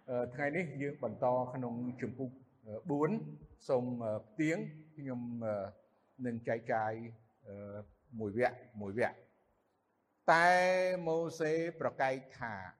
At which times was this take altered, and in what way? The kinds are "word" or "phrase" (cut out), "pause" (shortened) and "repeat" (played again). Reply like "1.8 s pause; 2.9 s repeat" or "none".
none

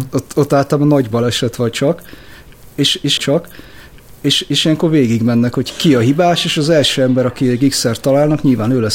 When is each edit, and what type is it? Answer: 3.2 s repeat

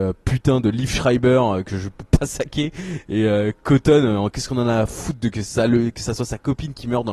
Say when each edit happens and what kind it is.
none

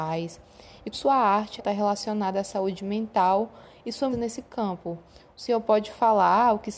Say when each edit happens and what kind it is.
0.9 s word; 1.6 s word; 4.1 s word

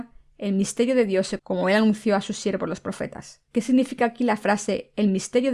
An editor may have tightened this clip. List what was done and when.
1.4 s word; 3.5 s pause

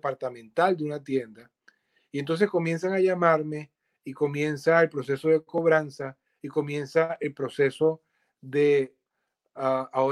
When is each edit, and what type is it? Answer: none

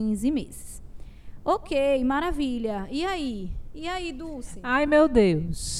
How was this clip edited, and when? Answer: none

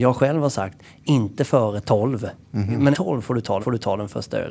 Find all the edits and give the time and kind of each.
2.4 s pause; 2.9 s word; 3.6 s repeat

